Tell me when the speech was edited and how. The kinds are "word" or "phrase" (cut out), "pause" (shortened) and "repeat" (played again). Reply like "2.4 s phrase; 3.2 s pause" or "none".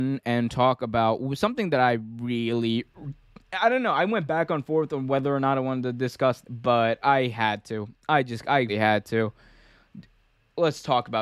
6.4 s word; 7.0 s word; 8.7 s word